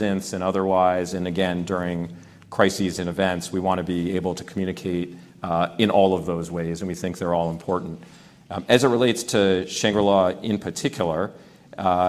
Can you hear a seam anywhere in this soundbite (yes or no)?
no